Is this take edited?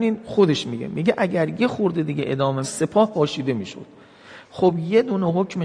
yes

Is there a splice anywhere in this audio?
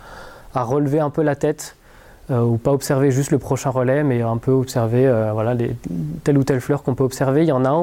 no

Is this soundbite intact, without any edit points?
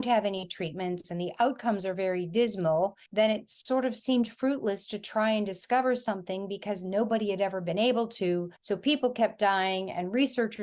no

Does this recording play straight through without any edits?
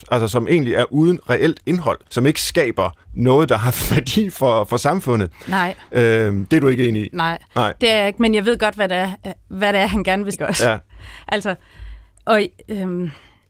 no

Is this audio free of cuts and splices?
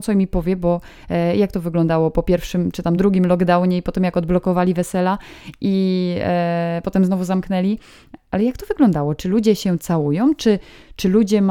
yes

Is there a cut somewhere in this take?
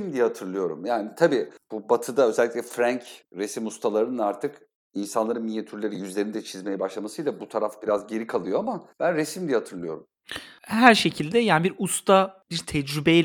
yes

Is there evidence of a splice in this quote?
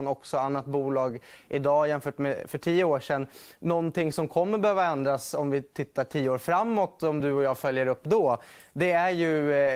no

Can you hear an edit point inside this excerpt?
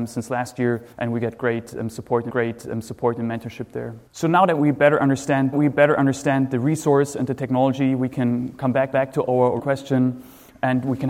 yes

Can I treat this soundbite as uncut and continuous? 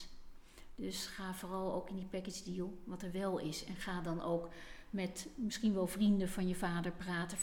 yes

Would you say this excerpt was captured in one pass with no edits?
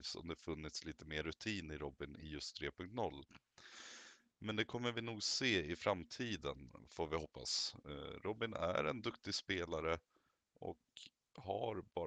yes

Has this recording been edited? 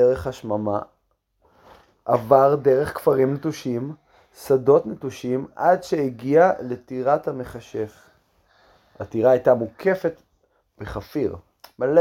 no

